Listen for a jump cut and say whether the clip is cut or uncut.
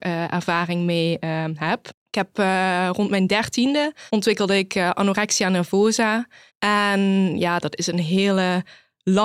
cut